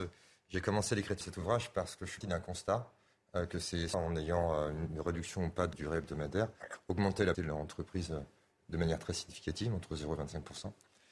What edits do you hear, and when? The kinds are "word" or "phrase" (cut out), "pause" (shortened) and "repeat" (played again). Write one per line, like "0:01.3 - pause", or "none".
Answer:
0:01.2 - word
0:02.2 - word
0:03.9 - word
0:05.7 - word
0:07.3 - word